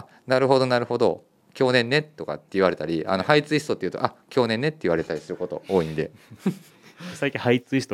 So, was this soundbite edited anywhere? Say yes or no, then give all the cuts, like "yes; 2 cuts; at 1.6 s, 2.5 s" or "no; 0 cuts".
no; 0 cuts